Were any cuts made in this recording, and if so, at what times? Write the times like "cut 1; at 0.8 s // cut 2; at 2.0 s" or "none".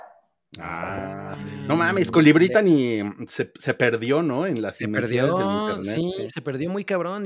none